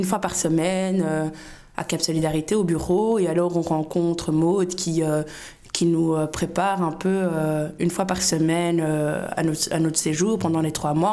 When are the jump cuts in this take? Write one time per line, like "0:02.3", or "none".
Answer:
none